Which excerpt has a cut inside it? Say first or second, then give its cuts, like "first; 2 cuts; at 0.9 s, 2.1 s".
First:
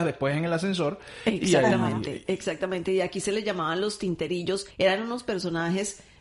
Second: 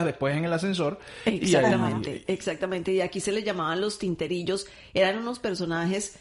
first; 1 cut; at 4.7 s